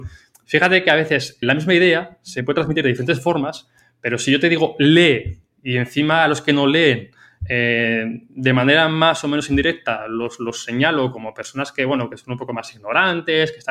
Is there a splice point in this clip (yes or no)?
yes